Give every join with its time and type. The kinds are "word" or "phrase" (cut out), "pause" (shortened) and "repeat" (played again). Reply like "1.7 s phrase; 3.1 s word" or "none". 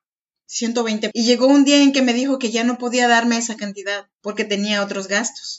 1.1 s word; 4.1 s pause